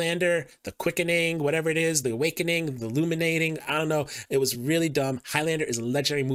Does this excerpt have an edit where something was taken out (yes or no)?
no